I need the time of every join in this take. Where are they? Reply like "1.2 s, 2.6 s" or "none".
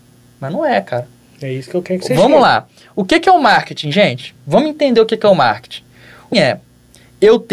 6.3 s